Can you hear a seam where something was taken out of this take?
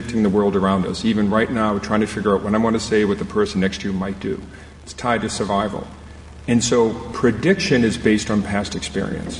no; 0 cuts

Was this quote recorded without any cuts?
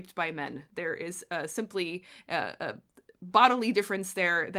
yes; 0 cuts

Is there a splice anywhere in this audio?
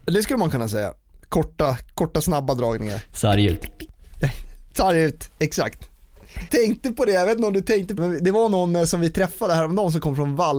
yes; 2 cuts; at 6.5 s, 8.0 s

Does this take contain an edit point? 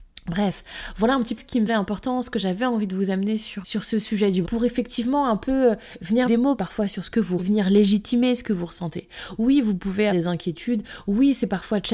yes; 8 cuts; at 1.4 s, 1.7 s, 3.6 s, 4.4 s, 6.3 s, 6.6 s, 7.4 s, 10.1 s

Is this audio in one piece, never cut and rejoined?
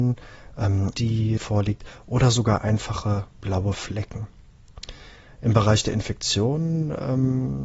no; 3 cuts; at 0.9 s, 1.4 s, 3.3 s

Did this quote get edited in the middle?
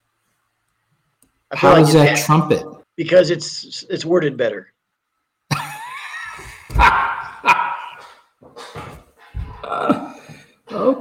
yes; 1 cut; at 2.8 s

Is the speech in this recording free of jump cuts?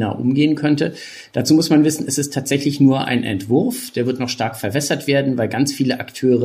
yes; 0 cuts

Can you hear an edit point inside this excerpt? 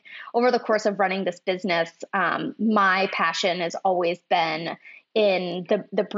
no; 0 cuts

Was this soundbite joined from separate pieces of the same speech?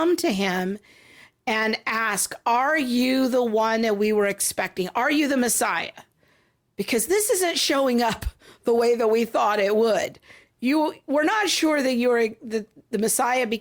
no; 0 cuts

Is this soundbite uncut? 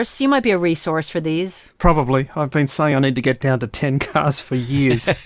yes; 0 cuts

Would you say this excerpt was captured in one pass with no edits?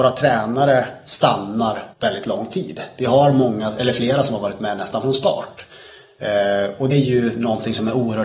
no; 2 cuts; at 1.9 s, 6.9 s

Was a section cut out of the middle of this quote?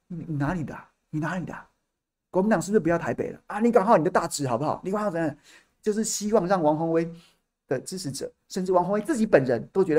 no; 0 cuts

